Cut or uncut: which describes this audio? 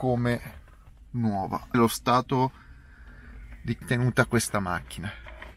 cut